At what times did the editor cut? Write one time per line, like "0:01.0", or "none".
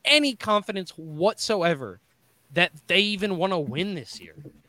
none